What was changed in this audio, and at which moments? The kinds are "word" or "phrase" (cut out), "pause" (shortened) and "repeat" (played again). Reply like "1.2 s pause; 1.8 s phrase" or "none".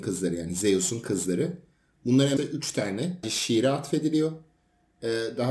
2.4 s word; 3.2 s word